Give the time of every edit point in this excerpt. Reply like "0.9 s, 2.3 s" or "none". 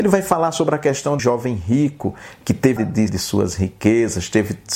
1.2 s, 2.8 s, 3.1 s